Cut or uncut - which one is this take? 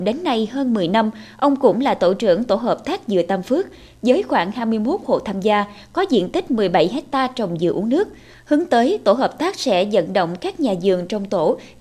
uncut